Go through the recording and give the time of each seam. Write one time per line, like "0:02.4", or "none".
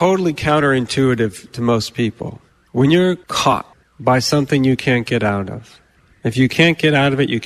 none